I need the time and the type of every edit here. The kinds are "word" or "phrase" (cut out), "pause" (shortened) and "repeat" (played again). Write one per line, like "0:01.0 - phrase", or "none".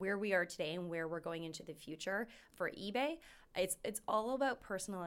none